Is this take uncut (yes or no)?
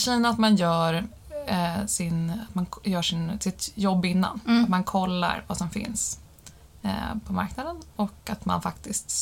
yes